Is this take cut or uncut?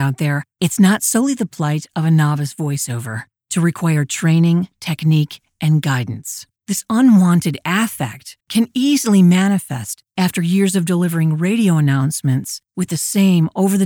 cut